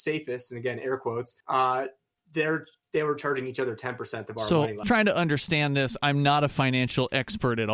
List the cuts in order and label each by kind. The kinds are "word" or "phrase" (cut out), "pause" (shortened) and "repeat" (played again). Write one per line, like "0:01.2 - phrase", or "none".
0:01.4 - pause
0:04.8 - phrase